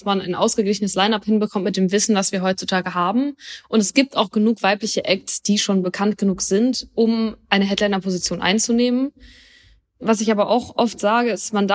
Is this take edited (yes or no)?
no